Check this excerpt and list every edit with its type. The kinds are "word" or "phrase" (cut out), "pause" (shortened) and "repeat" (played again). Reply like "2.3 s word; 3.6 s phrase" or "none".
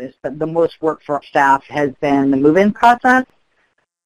1.2 s word